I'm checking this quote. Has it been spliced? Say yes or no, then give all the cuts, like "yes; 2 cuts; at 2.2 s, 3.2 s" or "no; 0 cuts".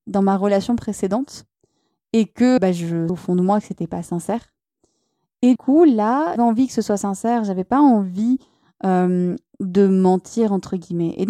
yes; 4 cuts; at 2.6 s, 3.1 s, 5.6 s, 6.4 s